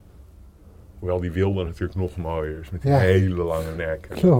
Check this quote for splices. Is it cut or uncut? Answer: uncut